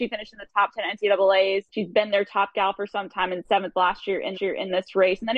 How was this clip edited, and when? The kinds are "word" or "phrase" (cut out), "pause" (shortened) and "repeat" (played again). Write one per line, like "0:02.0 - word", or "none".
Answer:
0:01.7 - pause
0:04.3 - repeat